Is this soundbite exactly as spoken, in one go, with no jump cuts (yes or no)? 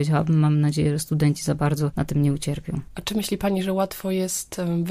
yes